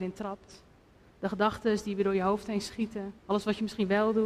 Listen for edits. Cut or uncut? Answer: cut